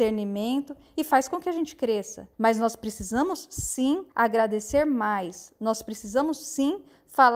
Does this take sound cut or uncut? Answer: cut